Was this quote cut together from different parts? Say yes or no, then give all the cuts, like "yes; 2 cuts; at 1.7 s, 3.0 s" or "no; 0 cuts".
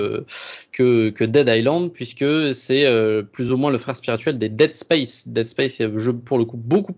no; 0 cuts